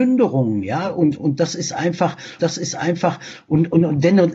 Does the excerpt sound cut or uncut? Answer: cut